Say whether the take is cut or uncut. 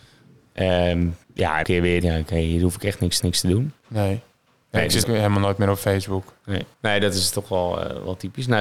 cut